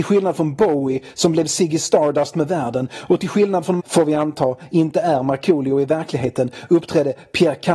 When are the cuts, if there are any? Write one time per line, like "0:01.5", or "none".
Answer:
0:03.8